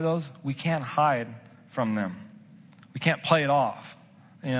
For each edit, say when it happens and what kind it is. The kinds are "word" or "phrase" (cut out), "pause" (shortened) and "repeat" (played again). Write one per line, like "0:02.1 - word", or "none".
none